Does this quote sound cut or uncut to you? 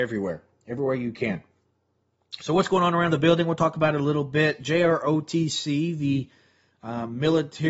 uncut